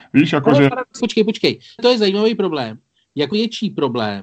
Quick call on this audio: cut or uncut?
cut